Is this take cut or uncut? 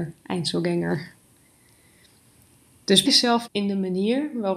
cut